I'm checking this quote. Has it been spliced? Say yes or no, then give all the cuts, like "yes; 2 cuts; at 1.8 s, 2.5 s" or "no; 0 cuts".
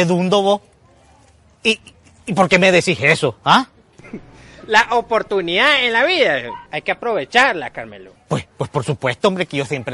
yes; 2 cuts; at 6.7 s, 8.5 s